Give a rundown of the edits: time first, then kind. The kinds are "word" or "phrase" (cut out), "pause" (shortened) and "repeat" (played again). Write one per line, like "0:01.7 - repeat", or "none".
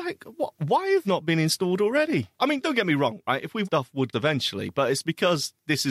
0:01.0 - word
0:02.3 - pause
0:03.6 - phrase
0:04.1 - phrase